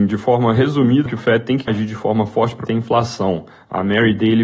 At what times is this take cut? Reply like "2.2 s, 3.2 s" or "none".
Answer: 1.1 s, 1.7 s, 2.7 s